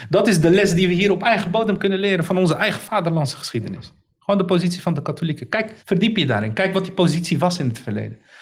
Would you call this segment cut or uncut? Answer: cut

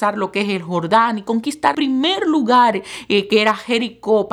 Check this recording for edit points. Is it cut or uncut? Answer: cut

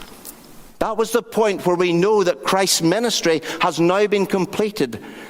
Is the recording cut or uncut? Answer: uncut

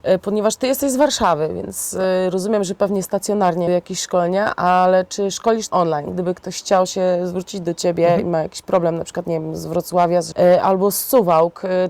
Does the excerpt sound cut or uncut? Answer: cut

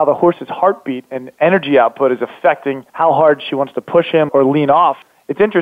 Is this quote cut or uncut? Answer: cut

